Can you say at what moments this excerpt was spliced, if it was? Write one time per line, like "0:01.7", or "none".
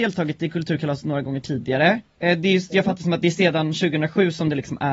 none